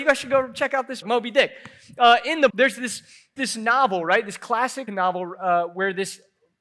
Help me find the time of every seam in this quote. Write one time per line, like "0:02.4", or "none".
0:01.0
0:02.5
0:03.4
0:04.9